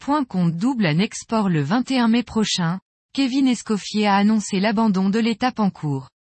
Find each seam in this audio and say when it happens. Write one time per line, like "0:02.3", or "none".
none